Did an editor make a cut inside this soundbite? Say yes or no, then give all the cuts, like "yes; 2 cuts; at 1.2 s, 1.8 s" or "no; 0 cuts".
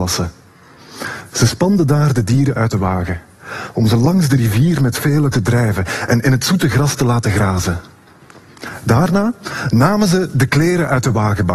yes; 1 cut; at 5.3 s